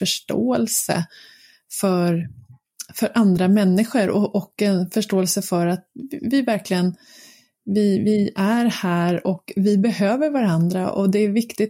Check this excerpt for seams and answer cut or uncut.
uncut